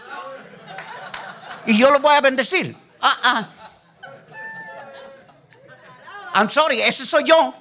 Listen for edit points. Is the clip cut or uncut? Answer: uncut